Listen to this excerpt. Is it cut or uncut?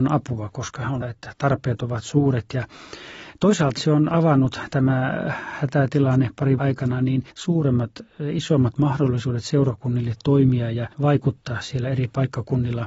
cut